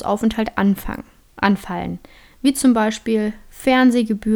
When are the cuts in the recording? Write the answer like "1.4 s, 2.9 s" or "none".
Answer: none